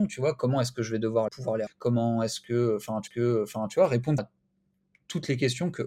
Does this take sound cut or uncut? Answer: cut